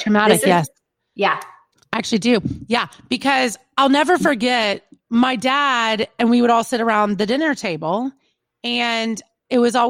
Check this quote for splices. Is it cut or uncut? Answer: uncut